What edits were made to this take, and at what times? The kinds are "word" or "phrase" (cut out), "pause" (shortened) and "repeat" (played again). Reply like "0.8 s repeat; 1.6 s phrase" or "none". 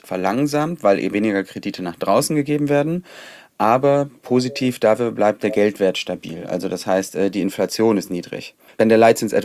1.1 s word